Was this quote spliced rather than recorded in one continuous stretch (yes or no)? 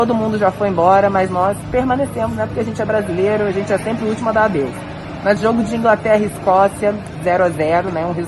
yes